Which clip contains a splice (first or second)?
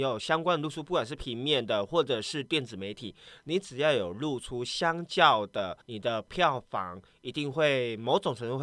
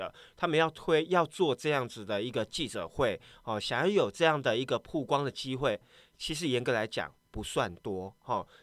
first